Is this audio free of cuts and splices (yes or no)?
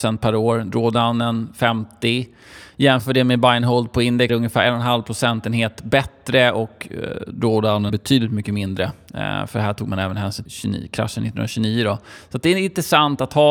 no